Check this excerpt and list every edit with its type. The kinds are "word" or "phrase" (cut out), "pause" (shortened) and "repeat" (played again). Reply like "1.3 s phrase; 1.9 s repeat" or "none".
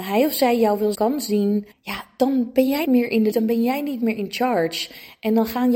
0.9 s word; 1.7 s pause; 2.9 s word; 3.3 s word